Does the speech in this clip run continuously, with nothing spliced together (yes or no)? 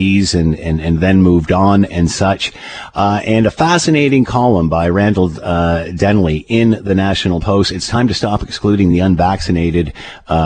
yes